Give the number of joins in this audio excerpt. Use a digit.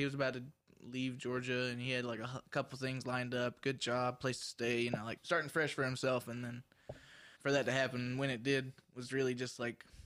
2